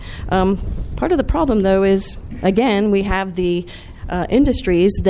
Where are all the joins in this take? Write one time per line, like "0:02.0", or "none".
none